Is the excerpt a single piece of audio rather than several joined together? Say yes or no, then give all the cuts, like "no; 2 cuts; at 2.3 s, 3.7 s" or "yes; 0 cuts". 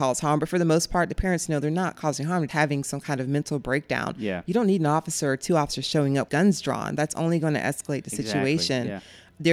no; 2 cuts; at 2.5 s, 6.3 s